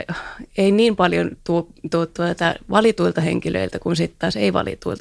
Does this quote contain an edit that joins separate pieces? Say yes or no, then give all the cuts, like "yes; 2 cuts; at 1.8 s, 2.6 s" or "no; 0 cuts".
no; 0 cuts